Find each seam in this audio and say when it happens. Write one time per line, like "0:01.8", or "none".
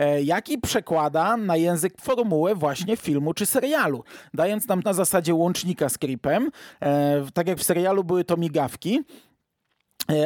0:02.0
0:04.8
0:07.6